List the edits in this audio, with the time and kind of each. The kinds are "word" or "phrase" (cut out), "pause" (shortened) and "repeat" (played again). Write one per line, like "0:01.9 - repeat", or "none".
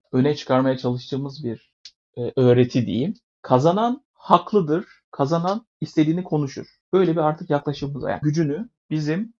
0:08.2 - word